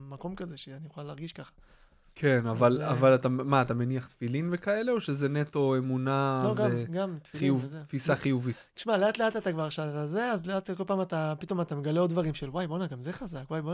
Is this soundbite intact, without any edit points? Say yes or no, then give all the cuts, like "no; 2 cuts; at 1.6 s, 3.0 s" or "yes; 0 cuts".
yes; 0 cuts